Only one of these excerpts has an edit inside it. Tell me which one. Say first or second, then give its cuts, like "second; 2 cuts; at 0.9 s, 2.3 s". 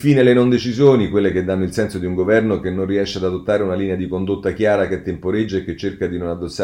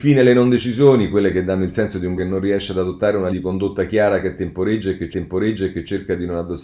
second; 3 cuts; at 2.2 s, 3.3 s, 5.1 s